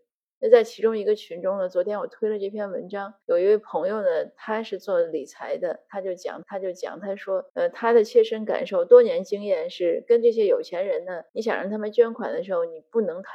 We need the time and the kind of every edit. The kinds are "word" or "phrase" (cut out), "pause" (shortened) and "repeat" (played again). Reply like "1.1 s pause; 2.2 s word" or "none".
3.2 s pause; 6.4 s repeat; 7.5 s pause; 11.3 s pause